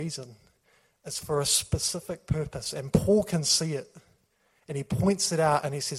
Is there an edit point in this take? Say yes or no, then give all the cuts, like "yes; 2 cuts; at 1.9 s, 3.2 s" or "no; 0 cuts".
no; 0 cuts